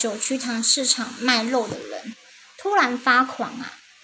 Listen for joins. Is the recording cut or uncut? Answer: uncut